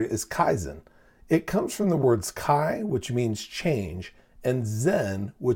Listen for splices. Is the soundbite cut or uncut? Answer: uncut